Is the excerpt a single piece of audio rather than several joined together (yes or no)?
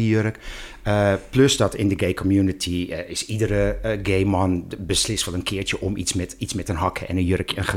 yes